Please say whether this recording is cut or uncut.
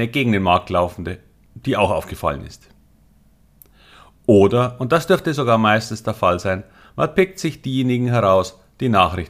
uncut